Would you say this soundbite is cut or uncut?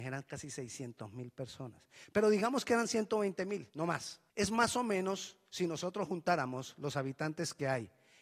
cut